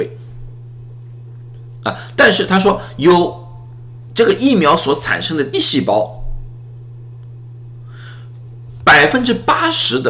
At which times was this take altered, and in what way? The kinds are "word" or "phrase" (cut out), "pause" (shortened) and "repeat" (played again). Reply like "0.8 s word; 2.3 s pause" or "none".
5.5 s word

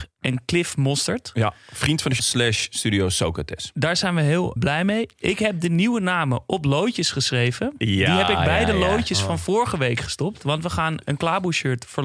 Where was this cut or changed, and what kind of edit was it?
2.2 s word; 4.6 s word

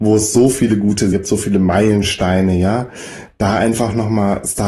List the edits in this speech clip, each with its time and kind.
1.1 s word

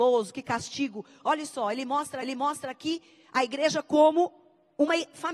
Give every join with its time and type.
2.2 s repeat

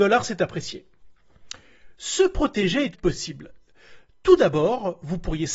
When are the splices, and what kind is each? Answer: 2.9 s phrase

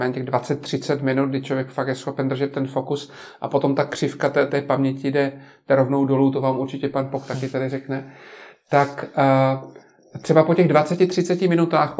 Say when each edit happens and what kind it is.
4.5 s word

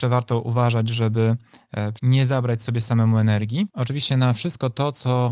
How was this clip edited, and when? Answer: 2.0 s word

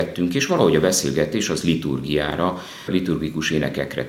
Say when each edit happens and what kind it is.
1.6 s word

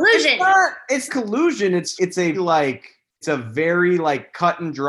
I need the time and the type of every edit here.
1.1 s word; 2.0 s word; 2.3 s word; 3.2 s word

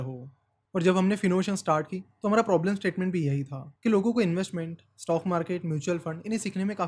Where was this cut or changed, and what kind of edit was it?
3.8 s pause

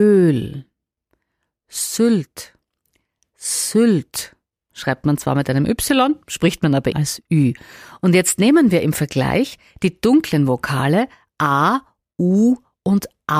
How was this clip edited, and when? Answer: 6.9 s word; 12.0 s word

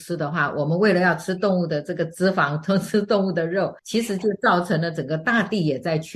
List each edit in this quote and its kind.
3.8 s pause

